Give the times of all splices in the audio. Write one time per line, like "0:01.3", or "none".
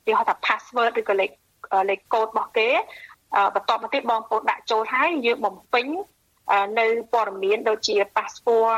none